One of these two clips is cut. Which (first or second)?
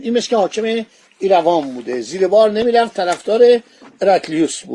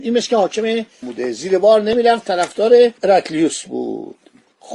second